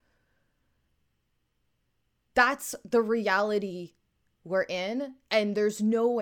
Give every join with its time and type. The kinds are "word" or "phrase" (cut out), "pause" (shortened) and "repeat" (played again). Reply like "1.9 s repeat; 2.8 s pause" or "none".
none